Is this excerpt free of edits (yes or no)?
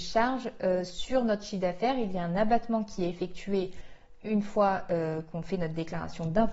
yes